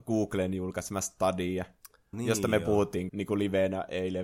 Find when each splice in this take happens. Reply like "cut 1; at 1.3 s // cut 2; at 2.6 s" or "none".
cut 1; at 2.1 s // cut 2; at 3.1 s